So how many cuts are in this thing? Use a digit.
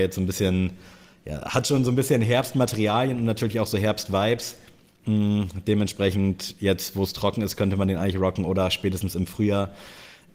0